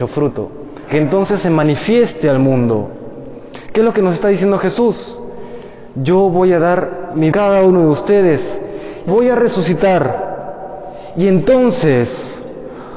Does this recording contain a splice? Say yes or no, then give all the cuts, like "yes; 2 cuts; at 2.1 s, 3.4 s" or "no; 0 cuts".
yes; 3 cuts; at 0.9 s, 7.3 s, 9.1 s